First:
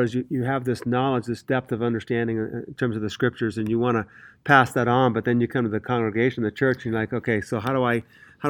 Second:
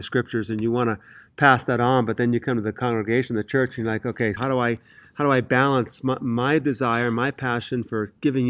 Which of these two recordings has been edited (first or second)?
second